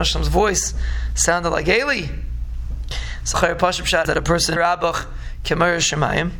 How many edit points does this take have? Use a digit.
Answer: 3